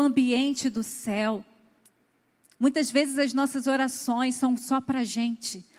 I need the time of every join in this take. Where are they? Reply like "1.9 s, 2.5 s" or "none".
none